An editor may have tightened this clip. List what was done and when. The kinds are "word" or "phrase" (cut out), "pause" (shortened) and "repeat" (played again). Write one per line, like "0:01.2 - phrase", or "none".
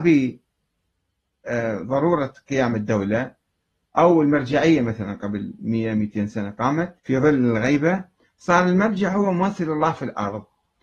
0:07.0 - pause